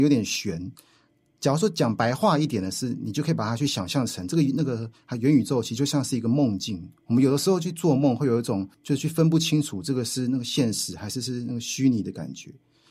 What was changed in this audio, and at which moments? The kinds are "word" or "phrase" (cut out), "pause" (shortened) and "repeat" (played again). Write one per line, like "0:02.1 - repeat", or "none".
0:07.0 - pause
0:08.7 - pause